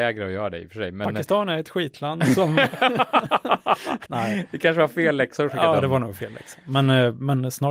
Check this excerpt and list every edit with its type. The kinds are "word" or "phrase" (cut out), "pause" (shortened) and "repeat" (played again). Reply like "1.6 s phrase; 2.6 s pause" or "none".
4.1 s word